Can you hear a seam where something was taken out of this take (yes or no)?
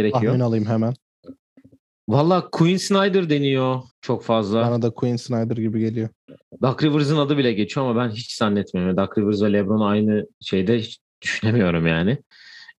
yes